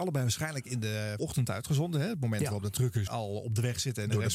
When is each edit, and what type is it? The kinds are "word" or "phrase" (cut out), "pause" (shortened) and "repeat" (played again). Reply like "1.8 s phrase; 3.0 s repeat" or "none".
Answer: 1.2 s word; 3.1 s word

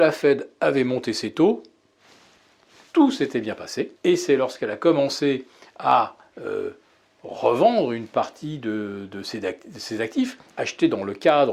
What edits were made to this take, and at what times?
3.9 s pause

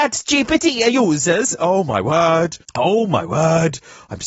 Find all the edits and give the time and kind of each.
2.6 s pause

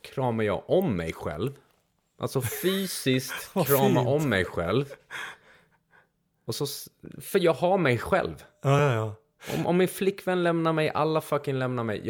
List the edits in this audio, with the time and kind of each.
none

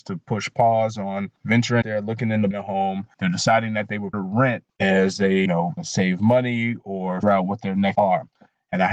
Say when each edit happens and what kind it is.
1.8 s word; 2.5 s word; 4.1 s word; 5.5 s word; 5.8 s word; 7.2 s word; 7.9 s word

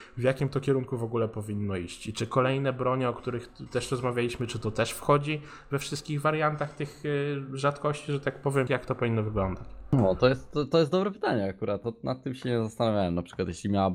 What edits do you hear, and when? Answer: 8.7 s word

